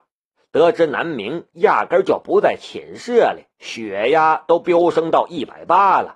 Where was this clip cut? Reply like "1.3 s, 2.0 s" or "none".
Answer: 3.5 s